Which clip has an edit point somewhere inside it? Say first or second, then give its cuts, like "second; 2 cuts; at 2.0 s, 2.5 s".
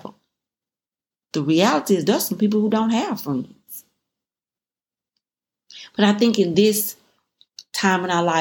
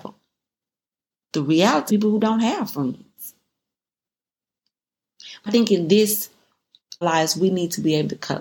second; 3 cuts; at 1.9 s, 5.5 s, 7.0 s